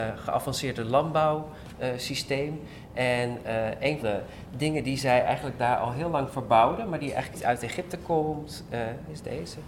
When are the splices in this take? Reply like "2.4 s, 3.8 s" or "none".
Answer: 4.0 s, 7.3 s